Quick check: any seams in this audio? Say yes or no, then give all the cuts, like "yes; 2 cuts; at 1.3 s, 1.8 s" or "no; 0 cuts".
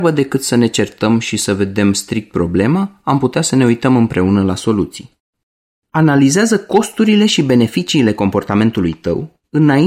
no; 0 cuts